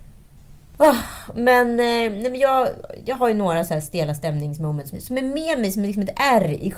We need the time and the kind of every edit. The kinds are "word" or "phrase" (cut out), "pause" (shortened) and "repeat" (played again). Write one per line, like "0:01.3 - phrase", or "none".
0:04.9 - phrase